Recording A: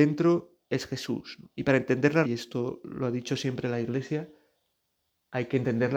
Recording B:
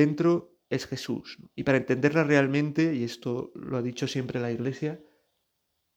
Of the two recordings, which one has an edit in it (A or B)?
A